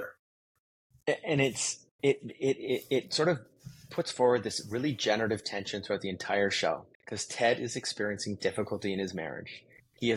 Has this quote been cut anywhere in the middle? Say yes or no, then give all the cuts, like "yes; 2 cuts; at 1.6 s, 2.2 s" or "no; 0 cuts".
yes; 1 cut; at 6.9 s